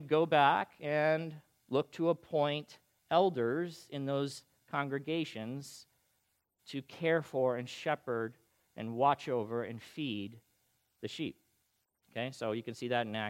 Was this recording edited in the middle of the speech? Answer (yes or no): no